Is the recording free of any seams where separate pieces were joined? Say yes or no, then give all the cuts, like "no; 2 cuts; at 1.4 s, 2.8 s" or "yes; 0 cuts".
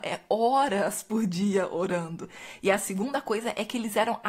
yes; 0 cuts